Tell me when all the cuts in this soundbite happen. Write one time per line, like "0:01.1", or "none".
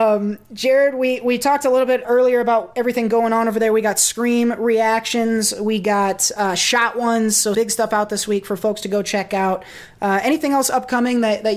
0:02.0
0:07.5